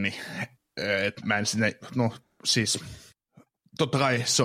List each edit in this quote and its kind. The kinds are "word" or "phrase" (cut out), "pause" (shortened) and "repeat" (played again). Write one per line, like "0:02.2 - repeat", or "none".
0:01.2 - word

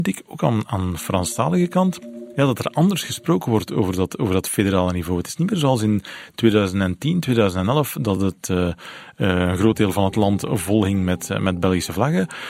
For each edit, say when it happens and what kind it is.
none

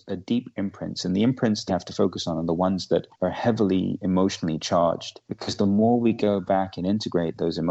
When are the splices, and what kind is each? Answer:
0:01.7 - word
0:03.1 - pause
0:05.2 - pause

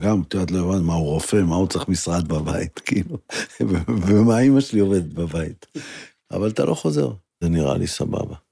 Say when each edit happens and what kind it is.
0:07.4 - word

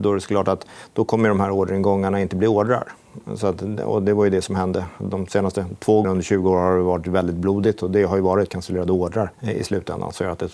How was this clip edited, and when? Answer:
0:06.0 - word
0:08.5 - word
0:09.3 - pause

